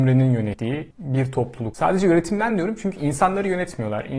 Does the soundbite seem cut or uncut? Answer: uncut